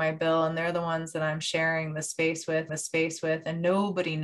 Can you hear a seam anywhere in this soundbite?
yes; 1 cut; at 2.7 s

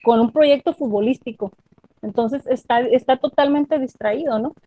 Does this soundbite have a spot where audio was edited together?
no; 0 cuts

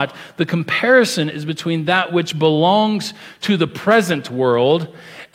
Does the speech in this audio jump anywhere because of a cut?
no; 0 cuts

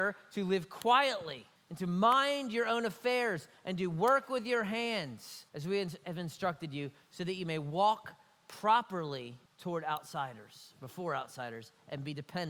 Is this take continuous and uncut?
no; 3 cuts; at 1.6 s, 5.5 s, 9.5 s

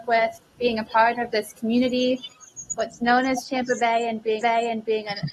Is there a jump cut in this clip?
yes; 1 cut; at 4.4 s

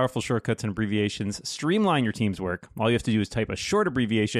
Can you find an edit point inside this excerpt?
no; 0 cuts

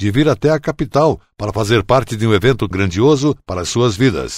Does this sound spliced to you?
yes; 1 cut; at 2.7 s

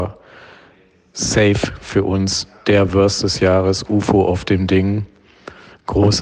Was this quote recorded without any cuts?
yes; 0 cuts

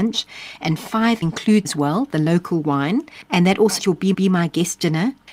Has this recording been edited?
yes; 4 cuts; at 1.2 s, 1.6 s, 3.8 s, 4.1 s

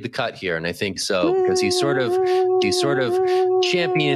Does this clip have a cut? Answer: yes; 2 cuts; at 1.0 s, 2.6 s

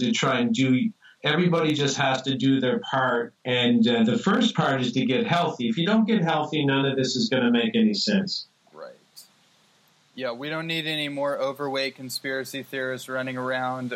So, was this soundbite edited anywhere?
yes; 1 cut; at 3.4 s

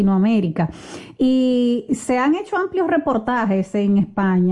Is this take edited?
no; 0 cuts

